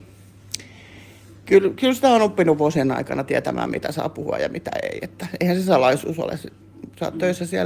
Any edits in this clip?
no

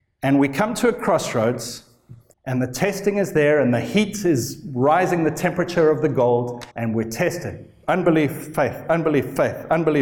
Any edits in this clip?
yes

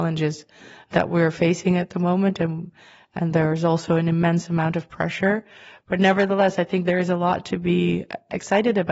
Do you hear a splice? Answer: no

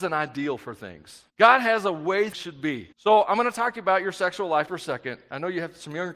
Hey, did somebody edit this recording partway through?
yes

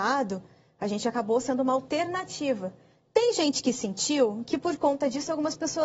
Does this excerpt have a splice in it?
no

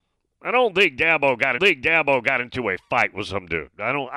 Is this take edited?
yes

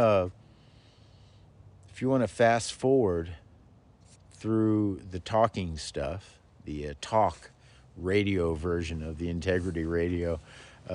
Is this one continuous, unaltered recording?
yes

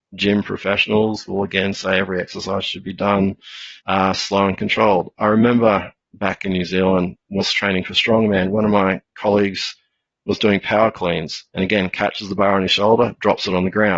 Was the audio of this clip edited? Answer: yes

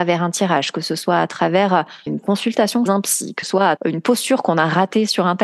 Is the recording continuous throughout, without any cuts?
no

